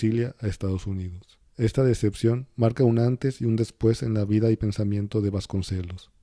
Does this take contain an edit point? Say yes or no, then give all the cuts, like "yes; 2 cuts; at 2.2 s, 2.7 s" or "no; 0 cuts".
yes; 1 cut; at 1.5 s